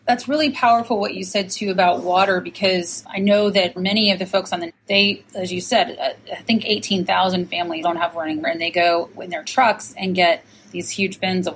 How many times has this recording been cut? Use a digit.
6